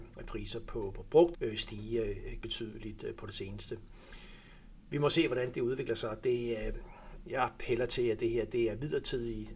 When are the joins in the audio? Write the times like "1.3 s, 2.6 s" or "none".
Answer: 1.3 s, 2.4 s, 5.5 s